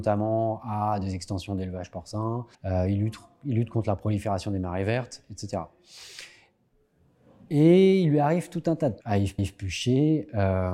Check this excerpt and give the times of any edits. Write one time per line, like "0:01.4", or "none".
0:02.5
0:09.0
0:09.4